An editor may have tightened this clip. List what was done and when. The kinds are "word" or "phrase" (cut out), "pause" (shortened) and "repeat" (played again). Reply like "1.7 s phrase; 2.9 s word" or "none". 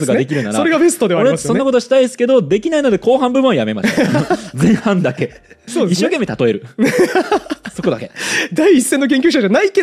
5.7 s word